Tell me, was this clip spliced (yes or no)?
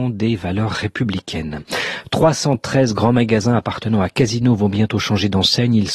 no